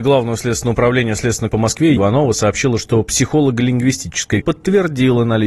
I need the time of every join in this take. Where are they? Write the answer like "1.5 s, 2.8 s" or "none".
1.5 s, 2.0 s, 4.4 s